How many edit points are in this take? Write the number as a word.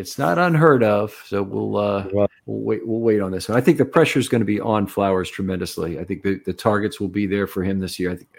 one